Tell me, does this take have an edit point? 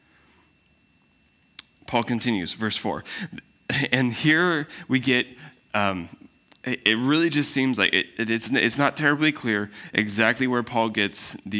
no; 0 cuts

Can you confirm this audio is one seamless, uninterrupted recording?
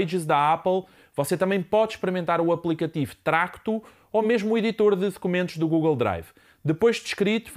yes; 0 cuts

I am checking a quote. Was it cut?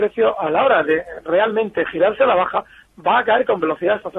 no; 0 cuts

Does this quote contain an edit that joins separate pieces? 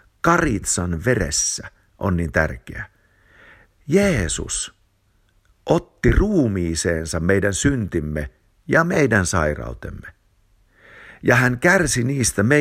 no; 0 cuts

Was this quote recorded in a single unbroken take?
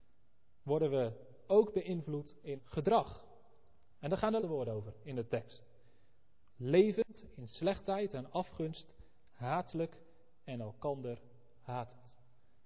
no; 2 cuts; at 2.6 s, 4.4 s

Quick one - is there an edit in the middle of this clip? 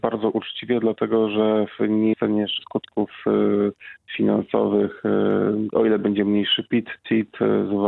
yes; 3 cuts; at 2.1 s, 2.6 s, 5.7 s

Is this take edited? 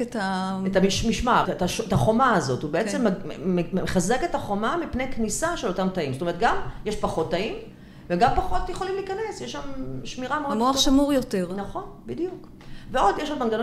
yes; 1 cut; at 1.4 s

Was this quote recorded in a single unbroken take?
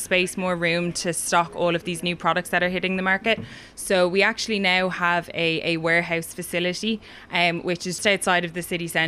no; 1 cut; at 8.0 s

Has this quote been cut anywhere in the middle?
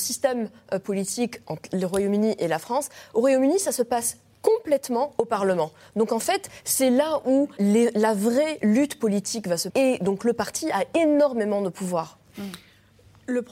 yes; 2 cuts; at 7.6 s, 9.7 s

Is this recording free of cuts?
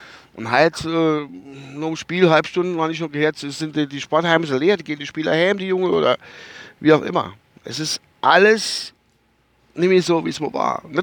yes; 0 cuts

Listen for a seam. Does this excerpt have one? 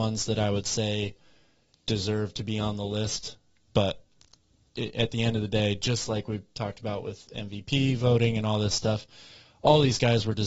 no; 0 cuts

